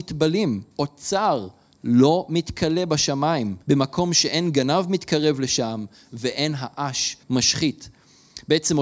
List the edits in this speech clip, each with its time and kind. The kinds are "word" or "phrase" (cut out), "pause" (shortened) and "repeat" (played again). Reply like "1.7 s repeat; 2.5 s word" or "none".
3.6 s pause; 7.2 s pause